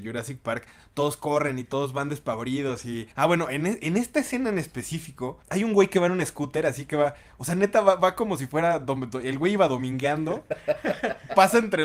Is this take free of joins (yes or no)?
no